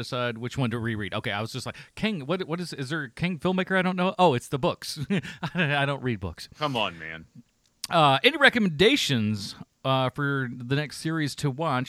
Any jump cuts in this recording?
no; 0 cuts

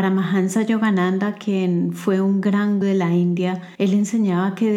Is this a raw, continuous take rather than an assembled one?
no; 2 cuts; at 2.8 s, 3.7 s

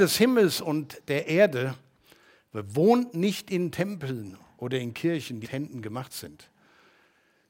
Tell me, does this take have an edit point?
yes; 1 cut; at 5.4 s

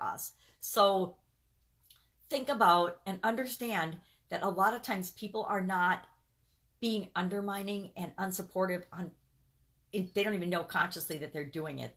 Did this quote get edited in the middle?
no; 0 cuts

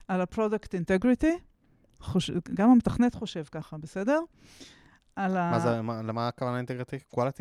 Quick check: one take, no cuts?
yes; 0 cuts

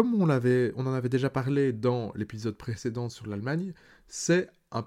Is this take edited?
no; 0 cuts

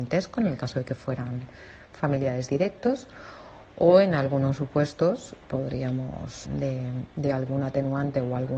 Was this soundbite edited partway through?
yes; 2 cuts; at 5.5 s, 6.4 s

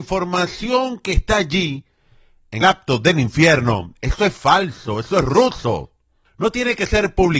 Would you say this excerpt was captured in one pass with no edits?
no; 1 cut; at 2.6 s

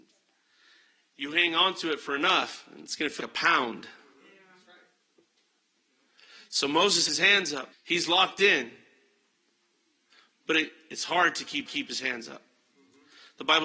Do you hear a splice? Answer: yes; 4 cuts; at 3.2 s, 7.1 s, 7.7 s, 11.7 s

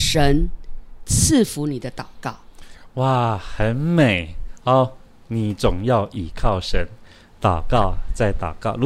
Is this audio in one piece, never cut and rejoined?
yes; 0 cuts

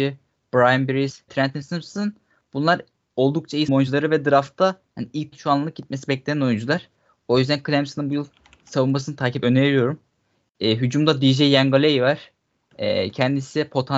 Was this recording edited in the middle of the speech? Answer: yes; 4 cuts; at 1.3 s, 3.7 s, 5.3 s, 9.4 s

